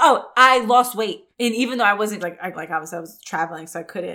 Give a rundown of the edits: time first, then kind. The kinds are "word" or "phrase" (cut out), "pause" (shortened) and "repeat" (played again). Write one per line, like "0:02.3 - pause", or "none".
0:01.3 - pause
0:02.2 - phrase
0:02.5 - word